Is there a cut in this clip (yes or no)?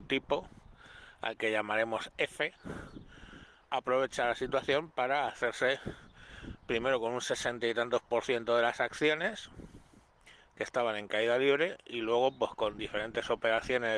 yes